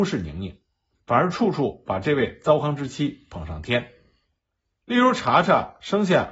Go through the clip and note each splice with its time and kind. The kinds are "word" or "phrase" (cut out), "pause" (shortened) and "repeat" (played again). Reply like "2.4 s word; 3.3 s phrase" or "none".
none